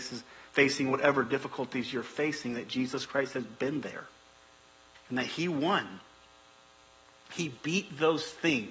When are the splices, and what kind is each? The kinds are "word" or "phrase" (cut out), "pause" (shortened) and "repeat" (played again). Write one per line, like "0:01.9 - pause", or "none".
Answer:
none